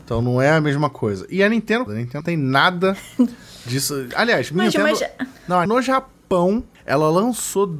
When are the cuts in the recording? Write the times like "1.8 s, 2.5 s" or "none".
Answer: 1.9 s, 2.2 s, 4.7 s, 5.7 s